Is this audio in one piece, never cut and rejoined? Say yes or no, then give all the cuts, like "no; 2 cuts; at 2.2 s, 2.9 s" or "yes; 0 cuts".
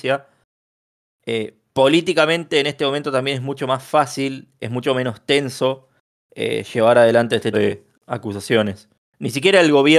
no; 1 cut; at 7.5 s